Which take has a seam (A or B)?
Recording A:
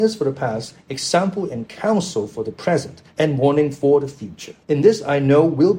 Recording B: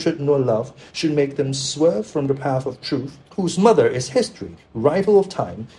A